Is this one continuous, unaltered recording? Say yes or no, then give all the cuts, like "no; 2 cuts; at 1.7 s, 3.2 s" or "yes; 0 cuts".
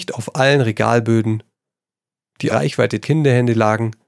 no; 2 cuts; at 2.5 s, 3.0 s